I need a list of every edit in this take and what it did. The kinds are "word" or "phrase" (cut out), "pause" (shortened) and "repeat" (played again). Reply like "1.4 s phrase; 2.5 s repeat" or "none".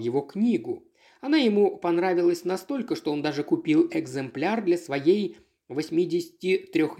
none